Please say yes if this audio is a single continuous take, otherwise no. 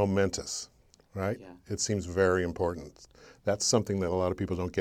yes